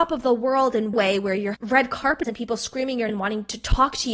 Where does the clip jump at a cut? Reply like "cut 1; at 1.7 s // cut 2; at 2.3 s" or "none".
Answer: cut 1; at 0.9 s // cut 2; at 1.5 s // cut 3; at 2.2 s // cut 4; at 3.1 s